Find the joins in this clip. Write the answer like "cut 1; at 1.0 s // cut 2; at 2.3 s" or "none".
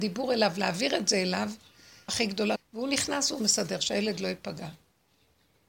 cut 1; at 2.1 s // cut 2; at 2.6 s